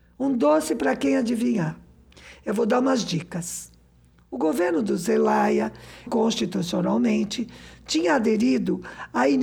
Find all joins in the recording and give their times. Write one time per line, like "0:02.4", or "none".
0:06.1